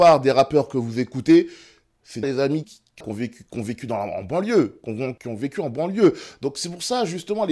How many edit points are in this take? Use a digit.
4